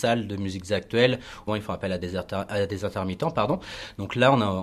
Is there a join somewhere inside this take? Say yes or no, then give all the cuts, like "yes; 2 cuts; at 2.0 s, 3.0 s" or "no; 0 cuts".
yes; 1 cut; at 1.5 s